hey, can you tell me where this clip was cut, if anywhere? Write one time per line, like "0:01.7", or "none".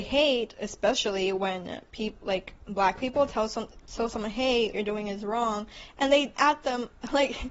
0:04.7
0:06.4